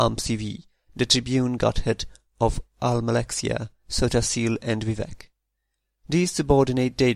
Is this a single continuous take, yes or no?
yes